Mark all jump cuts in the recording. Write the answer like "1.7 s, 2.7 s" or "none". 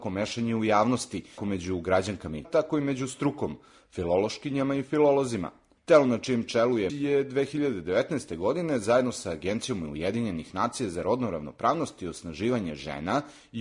1.4 s, 2.4 s, 6.9 s